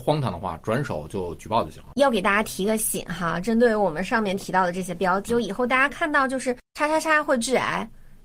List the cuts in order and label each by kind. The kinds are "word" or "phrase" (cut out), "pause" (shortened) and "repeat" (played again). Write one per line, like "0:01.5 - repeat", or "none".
0:05.3 - word